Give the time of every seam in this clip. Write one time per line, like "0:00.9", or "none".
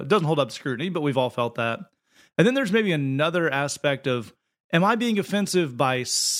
none